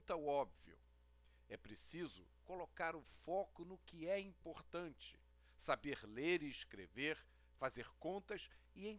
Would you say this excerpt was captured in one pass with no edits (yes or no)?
no